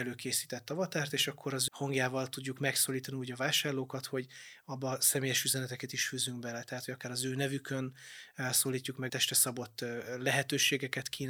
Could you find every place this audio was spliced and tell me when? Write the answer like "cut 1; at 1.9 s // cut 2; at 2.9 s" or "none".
cut 1; at 1.7 s // cut 2; at 9.1 s

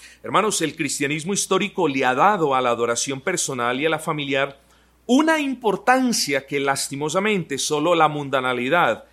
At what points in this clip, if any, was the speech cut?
none

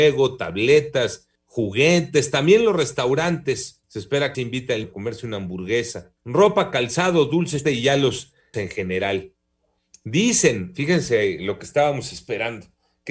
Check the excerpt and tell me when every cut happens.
cut 1; at 1.4 s // cut 2; at 3.8 s // cut 3; at 4.3 s // cut 4; at 4.8 s // cut 5; at 6.2 s // cut 6; at 7.6 s // cut 7; at 8.5 s // cut 8; at 9.7 s

